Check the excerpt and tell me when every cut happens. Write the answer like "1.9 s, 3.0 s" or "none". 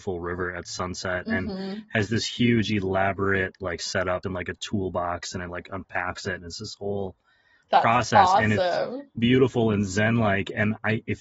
4.2 s, 9.2 s